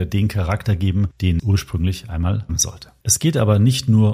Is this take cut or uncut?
cut